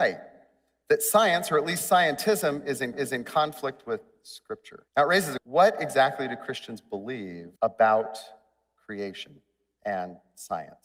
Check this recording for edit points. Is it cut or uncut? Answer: cut